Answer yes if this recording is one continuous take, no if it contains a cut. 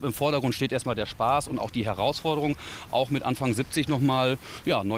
yes